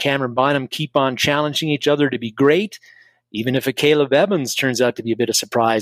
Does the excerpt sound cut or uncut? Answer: uncut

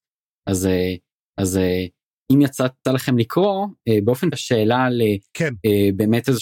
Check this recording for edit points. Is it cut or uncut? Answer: cut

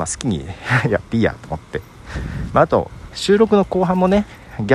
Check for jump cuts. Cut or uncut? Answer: uncut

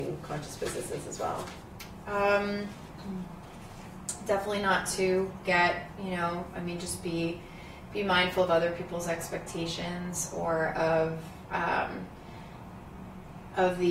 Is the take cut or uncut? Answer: uncut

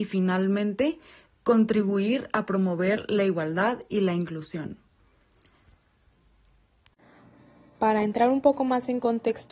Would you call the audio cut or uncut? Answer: uncut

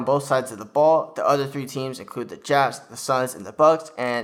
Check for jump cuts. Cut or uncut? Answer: uncut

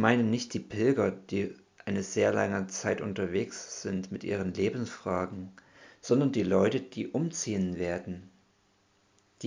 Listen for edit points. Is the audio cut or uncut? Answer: uncut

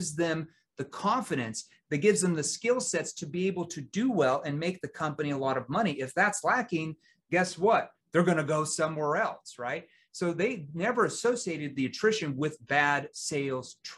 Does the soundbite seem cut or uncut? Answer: uncut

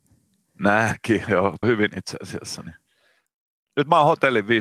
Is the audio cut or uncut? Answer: cut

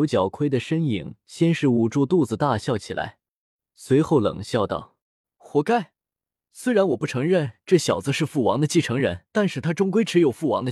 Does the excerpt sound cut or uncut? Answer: cut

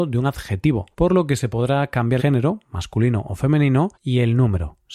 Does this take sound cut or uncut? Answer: cut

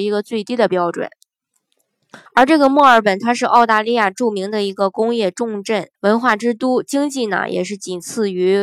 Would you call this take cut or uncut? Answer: cut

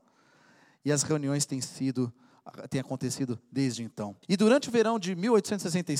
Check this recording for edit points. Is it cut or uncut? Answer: cut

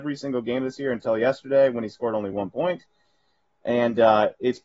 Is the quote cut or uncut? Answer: uncut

